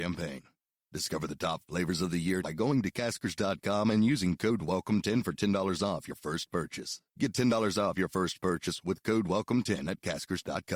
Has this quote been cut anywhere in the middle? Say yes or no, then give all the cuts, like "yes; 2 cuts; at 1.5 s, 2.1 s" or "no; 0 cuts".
yes; 2 cuts; at 2.4 s, 7.1 s